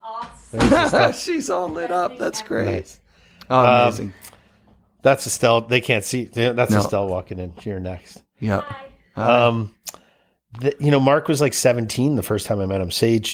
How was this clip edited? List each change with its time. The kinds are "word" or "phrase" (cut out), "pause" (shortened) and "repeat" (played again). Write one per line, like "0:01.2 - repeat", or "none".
none